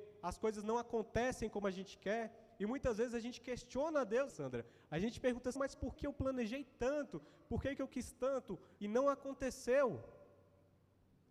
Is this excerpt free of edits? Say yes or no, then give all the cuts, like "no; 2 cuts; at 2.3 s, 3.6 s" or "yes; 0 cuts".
no; 4 cuts; at 4.3 s, 5.6 s, 6.0 s, 8.8 s